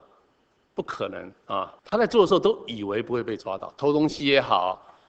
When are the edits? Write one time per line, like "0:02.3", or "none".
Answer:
0:01.8